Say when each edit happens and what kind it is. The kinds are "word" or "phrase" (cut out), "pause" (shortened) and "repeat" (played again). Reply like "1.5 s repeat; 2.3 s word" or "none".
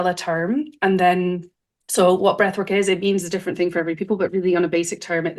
none